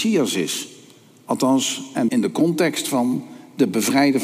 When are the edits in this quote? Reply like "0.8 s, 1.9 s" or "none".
2.1 s